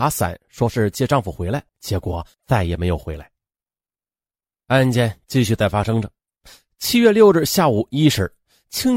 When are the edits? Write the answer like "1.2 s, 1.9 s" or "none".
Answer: 1.7 s, 2.3 s

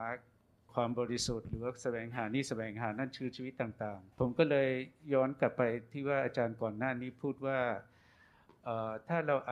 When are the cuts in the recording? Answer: 4.1 s

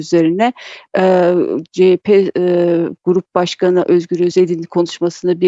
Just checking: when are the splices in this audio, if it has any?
none

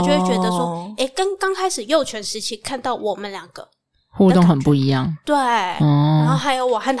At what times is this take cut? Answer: none

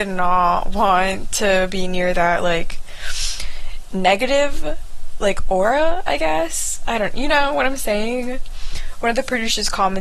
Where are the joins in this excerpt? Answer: none

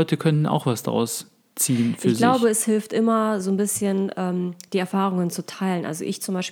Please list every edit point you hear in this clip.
none

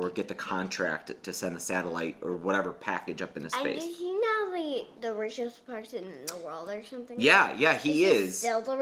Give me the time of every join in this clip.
none

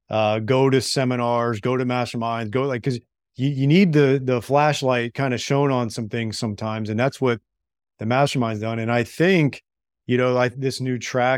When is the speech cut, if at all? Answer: none

